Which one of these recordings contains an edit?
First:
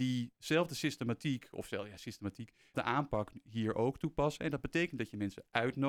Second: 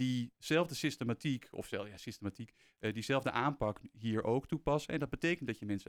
first; 1 cut; at 2.7 s

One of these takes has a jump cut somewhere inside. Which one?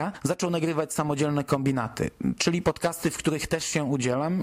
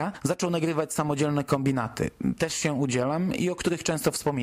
second; 1 cut; at 2.4 s

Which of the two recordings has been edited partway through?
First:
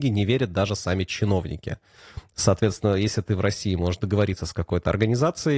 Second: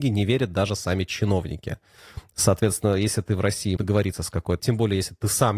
second; 2 cuts; at 3.8 s, 4.6 s

